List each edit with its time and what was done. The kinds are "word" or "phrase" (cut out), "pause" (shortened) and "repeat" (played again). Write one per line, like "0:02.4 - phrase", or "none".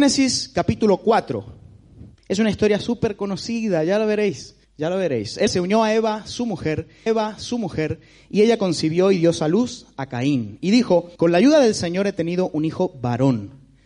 0:02.2 - pause
0:04.6 - pause
0:05.5 - word
0:07.1 - repeat
0:11.2 - pause